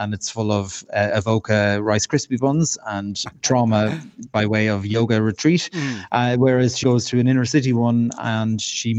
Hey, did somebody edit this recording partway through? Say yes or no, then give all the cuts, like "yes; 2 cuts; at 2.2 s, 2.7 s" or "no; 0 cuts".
yes; 2 cuts; at 3.3 s, 6.8 s